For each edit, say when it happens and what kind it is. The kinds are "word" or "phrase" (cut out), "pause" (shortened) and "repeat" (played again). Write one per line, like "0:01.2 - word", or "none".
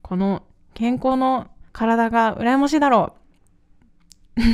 0:01.7 - pause